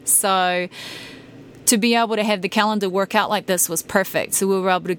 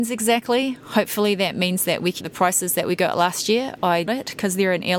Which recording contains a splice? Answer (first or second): second